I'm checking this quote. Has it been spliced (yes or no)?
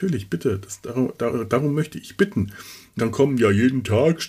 yes